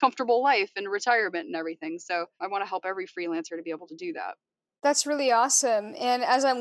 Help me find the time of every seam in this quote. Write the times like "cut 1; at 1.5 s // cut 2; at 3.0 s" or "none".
none